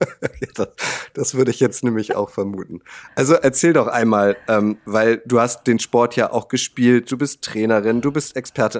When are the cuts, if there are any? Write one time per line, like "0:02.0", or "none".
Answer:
none